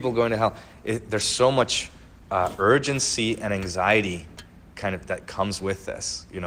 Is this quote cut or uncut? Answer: uncut